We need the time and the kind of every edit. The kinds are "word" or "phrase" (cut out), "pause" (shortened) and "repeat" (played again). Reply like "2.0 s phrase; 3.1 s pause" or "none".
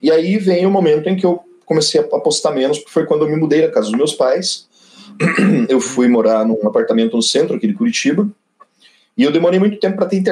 none